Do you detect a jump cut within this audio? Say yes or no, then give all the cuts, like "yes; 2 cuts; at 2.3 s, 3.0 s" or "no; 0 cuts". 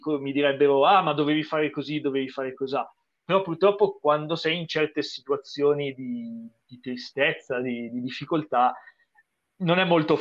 no; 0 cuts